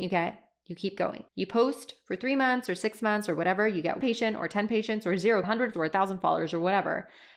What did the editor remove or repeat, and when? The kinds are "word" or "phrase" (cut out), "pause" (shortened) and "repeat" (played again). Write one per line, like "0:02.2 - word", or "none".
0:01.3 - pause
0:04.0 - word
0:05.4 - phrase
0:05.7 - word